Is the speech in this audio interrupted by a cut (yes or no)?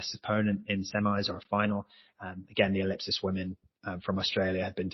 no